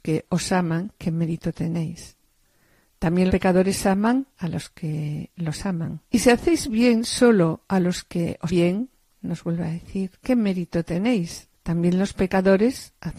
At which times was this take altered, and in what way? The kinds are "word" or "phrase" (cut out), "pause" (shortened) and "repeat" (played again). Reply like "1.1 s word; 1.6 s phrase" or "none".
3.3 s word; 4.3 s pause; 6.0 s pause; 8.5 s word; 11.5 s pause